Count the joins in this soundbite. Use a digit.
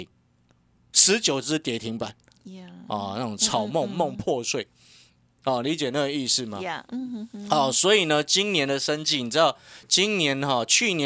0